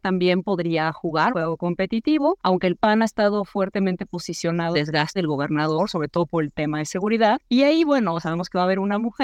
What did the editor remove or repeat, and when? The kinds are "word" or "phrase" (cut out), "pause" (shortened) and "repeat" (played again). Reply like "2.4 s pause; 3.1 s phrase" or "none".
1.3 s word; 4.7 s phrase; 5.2 s word